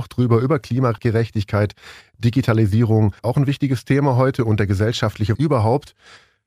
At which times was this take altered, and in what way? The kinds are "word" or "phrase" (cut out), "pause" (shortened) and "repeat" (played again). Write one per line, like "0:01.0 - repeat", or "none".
0:03.2 - pause
0:05.3 - word